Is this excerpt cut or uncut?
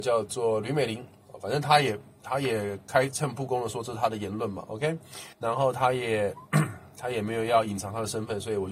cut